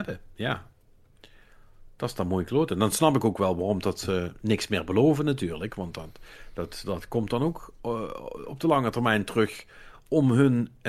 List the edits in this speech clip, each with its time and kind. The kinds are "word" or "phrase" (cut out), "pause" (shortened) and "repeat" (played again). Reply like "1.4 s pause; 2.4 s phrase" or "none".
none